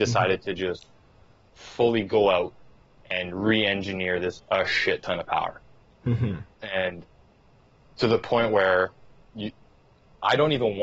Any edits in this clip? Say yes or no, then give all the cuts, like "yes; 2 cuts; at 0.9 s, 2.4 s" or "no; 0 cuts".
yes; 1 cut; at 4.4 s